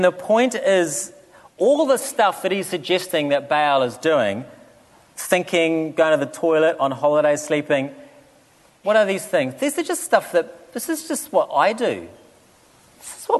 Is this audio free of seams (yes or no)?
yes